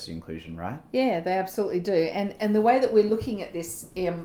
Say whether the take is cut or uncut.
uncut